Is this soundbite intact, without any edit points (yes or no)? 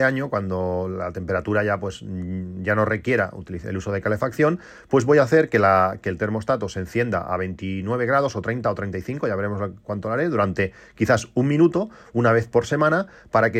yes